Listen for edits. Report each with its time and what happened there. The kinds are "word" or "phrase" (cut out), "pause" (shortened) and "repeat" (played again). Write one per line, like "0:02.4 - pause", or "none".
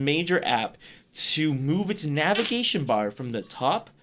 none